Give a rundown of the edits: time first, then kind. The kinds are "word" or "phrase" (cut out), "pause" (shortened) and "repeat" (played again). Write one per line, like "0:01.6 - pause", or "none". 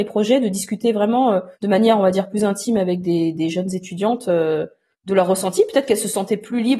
0:01.5 - pause
0:04.9 - pause